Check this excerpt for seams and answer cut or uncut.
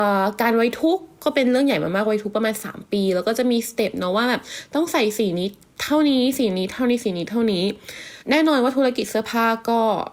cut